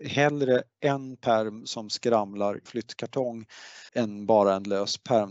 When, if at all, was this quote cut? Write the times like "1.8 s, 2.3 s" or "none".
2.7 s, 3.9 s